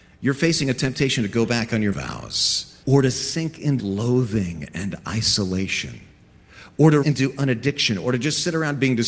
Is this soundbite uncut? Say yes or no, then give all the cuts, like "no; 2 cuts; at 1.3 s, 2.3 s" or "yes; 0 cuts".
no; 4 cuts; at 1.9 s, 2.8 s, 3.8 s, 7.0 s